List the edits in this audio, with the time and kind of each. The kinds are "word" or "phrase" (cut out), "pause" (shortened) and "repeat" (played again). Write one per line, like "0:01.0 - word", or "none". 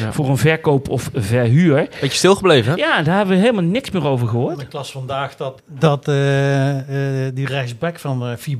0:05.6 - word